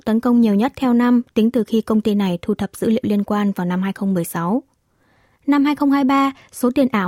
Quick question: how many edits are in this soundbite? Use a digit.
0